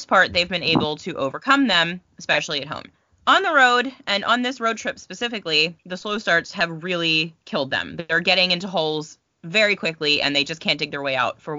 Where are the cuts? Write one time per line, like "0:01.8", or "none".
0:02.9
0:05.8
0:07.4